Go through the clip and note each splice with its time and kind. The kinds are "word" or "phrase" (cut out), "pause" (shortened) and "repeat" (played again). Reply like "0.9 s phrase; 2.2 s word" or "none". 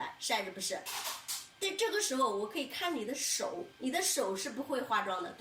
3.8 s pause